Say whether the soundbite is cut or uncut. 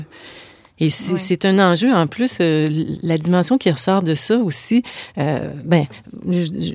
uncut